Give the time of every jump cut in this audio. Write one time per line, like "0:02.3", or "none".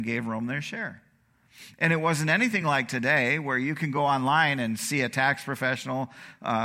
none